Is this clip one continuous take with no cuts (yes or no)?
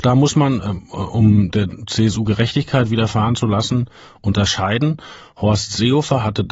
yes